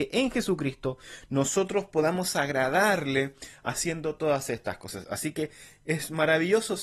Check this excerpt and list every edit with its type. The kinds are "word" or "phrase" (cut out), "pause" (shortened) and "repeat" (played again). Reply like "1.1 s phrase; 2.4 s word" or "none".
none